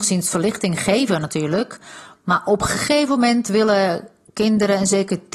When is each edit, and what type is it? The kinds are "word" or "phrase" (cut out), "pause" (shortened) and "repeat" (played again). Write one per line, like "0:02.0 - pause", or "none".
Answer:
none